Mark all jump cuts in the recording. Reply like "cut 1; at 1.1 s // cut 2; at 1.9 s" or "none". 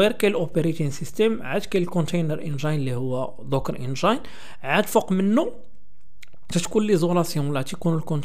none